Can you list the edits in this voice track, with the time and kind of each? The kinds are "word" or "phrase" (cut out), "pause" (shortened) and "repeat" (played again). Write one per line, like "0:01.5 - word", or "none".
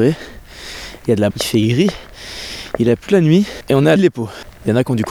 0:01.3 - word
0:03.1 - word
0:04.0 - word